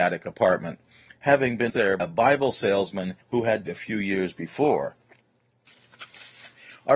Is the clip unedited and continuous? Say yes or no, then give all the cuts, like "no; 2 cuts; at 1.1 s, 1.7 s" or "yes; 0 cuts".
no; 4 cuts; at 1.7 s, 2.0 s, 3.2 s, 3.7 s